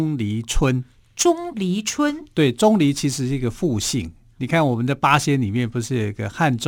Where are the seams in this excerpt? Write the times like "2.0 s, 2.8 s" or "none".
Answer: none